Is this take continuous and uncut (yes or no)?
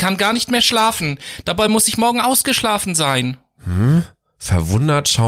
yes